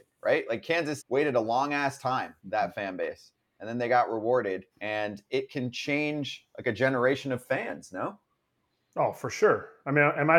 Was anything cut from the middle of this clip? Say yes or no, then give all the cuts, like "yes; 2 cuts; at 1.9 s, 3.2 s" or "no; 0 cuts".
yes; 3 cuts; at 1.0 s, 2.4 s, 4.7 s